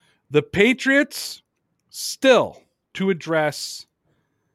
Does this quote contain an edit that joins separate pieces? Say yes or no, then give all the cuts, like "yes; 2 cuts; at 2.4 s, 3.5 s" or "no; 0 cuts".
yes; 1 cut; at 2.8 s